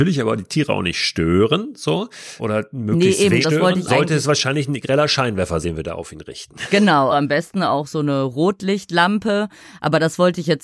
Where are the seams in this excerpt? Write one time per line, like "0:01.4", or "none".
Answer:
0:02.4
0:03.4
0:03.9
0:04.8
0:05.6
0:07.1